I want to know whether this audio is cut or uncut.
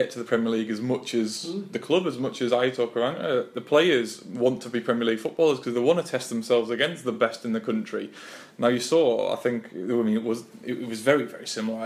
uncut